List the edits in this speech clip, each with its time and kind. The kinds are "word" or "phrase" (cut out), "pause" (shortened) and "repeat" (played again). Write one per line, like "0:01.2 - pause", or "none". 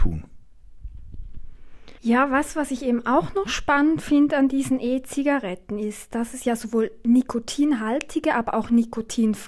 0:02.0 - pause